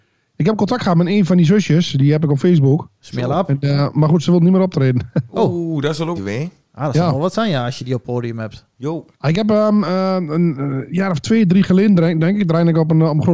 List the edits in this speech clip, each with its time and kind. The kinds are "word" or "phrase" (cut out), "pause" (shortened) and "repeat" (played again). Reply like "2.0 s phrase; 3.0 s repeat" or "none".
2.9 s pause; 6.2 s phrase; 9.1 s pause